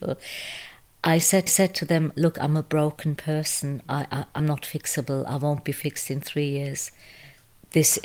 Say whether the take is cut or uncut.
cut